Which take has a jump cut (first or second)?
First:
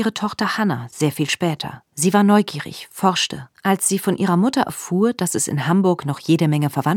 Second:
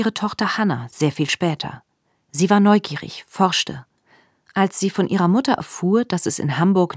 first